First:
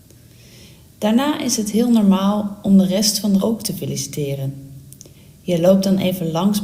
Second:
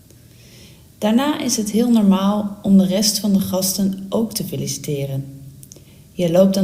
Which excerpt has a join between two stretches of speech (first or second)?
first